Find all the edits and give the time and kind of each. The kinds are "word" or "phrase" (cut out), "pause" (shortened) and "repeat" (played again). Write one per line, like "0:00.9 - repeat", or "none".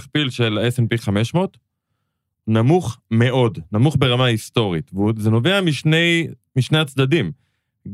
none

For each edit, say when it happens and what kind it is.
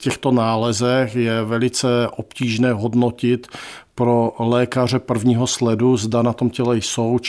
none

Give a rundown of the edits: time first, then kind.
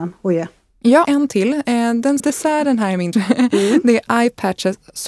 0:01.0 - phrase
0:02.2 - word
0:03.1 - word

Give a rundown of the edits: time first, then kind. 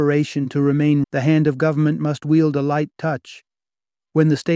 0:01.0 - word

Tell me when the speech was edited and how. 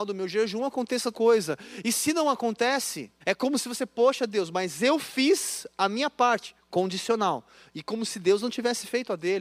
0:01.1 - word
0:03.2 - pause

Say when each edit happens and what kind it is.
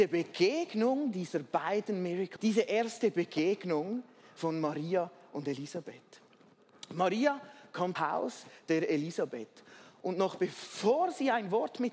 0:02.4 - word
0:08.0 - phrase

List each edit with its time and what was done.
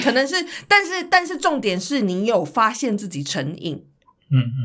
none

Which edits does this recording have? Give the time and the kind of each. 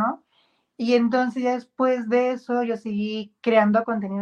none

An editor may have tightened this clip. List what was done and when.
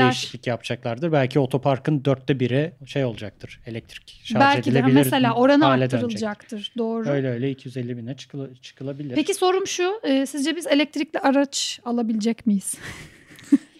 0:02.8 - pause

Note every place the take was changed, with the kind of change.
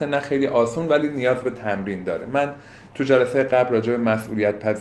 none

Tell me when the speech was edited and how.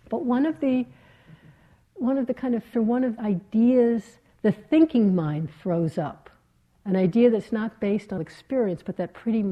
0:02.7 - word
0:03.2 - word
0:08.2 - word

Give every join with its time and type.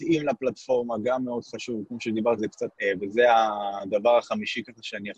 0:02.4 - word
0:02.7 - word

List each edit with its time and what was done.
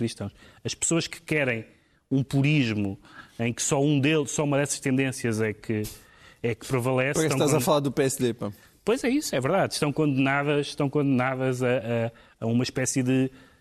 none

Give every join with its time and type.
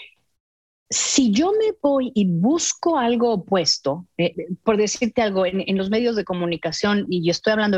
0:04.3 - word

